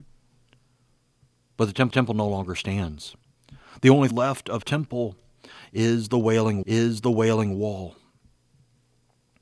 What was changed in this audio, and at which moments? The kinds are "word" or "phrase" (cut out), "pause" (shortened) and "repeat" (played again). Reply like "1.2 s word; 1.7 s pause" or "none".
1.9 s repeat; 4.1 s word; 4.6 s word; 6.6 s repeat